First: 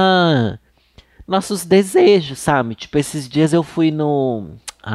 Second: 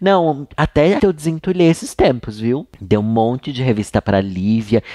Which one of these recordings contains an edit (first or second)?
second